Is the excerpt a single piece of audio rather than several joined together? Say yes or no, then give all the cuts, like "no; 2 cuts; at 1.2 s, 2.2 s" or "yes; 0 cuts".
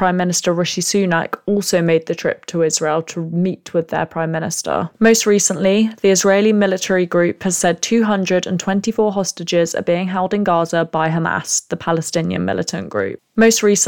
yes; 0 cuts